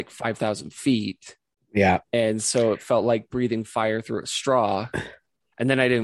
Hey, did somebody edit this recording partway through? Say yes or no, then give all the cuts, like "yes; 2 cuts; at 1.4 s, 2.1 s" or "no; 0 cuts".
yes; 1 cut; at 2.0 s